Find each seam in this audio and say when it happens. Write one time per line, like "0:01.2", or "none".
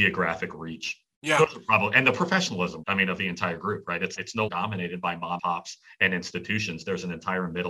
0:02.8
0:03.2
0:04.2
0:04.5
0:05.4